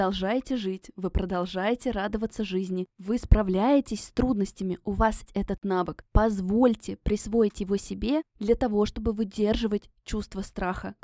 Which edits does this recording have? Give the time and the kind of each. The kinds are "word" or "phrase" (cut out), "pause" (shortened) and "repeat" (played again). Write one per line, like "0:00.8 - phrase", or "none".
0:05.3 - word